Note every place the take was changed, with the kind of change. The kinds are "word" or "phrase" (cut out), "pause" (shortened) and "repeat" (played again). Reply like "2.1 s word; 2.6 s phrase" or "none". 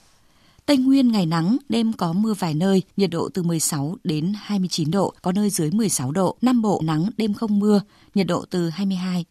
2.9 s pause; 5.2 s pause; 6.4 s pause; 6.8 s word